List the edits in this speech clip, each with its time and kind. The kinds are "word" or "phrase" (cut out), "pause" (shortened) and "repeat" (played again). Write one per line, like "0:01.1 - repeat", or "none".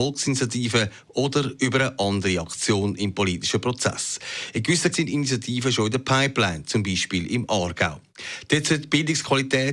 0:04.9 - word